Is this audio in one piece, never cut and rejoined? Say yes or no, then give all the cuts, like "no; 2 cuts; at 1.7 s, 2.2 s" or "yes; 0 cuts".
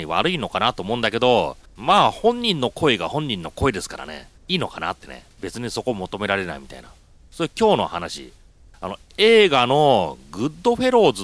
no; 3 cuts; at 1.7 s, 4.4 s, 5.3 s